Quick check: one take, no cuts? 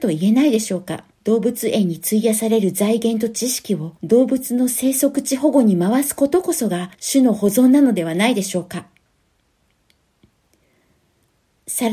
no; 3 cuts; at 1.1 s, 4.0 s, 6.9 s

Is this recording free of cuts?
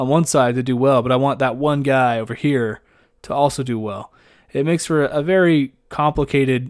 yes; 0 cuts

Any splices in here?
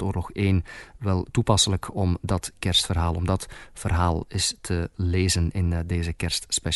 no; 0 cuts

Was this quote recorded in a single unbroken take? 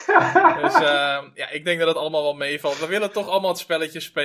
yes; 0 cuts

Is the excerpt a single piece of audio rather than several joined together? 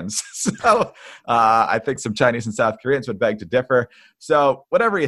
yes; 0 cuts

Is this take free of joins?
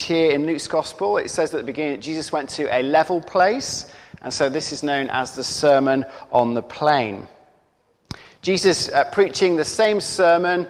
yes; 0 cuts

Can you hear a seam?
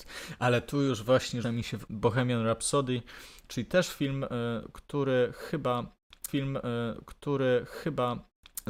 yes; 3 cuts; at 1.4 s, 1.9 s, 6.3 s

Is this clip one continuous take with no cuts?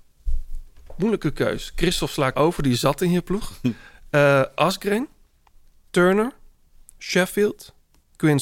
no; 1 cut; at 2.3 s

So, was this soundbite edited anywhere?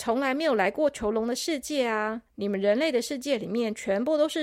yes; 1 cut; at 2.3 s

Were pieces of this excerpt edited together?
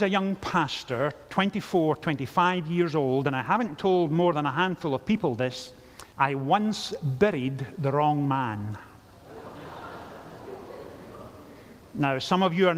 yes; 1 cut; at 6.1 s

